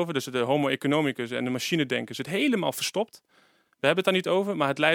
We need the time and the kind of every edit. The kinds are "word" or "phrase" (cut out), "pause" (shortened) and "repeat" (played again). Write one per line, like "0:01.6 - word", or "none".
none